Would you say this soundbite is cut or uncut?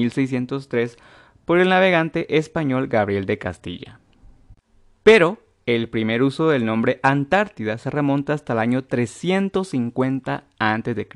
uncut